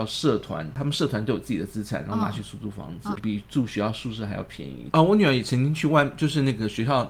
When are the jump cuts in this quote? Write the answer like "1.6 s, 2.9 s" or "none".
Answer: 3.2 s